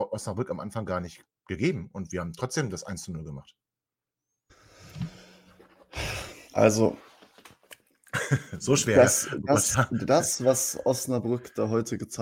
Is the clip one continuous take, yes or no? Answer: no